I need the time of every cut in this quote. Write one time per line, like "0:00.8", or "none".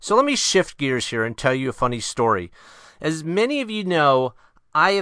none